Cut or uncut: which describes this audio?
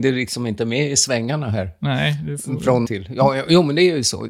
cut